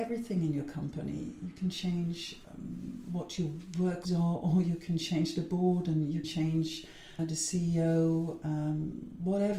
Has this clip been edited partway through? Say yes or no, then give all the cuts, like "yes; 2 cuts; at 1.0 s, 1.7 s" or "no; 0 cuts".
yes; 4 cuts; at 2.4 s, 4.0 s, 6.2 s, 7.2 s